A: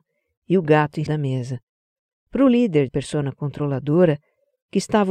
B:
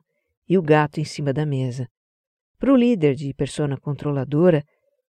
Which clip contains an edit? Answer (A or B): A